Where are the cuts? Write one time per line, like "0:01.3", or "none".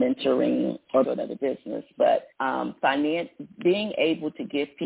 0:01.0
0:02.3

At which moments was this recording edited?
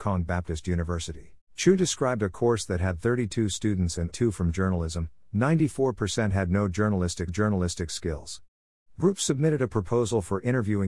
0:01.4
0:04.1
0:07.3

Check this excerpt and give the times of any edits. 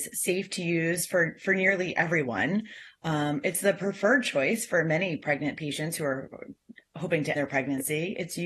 0:07.4

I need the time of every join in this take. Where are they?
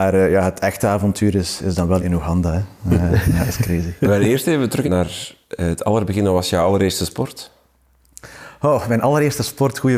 0:02.0
0:04.0
0:04.8

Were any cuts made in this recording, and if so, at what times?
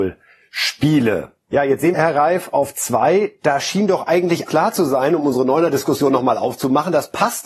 0:01.9
0:04.5

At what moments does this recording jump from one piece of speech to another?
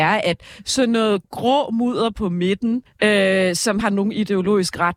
0:01.2
0:02.9
0:03.8

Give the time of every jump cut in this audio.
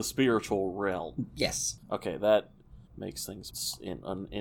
0:01.8
0:02.9
0:03.5

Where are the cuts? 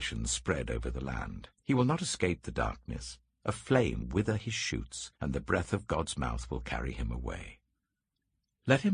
0:01.5
0:04.0
0:05.2

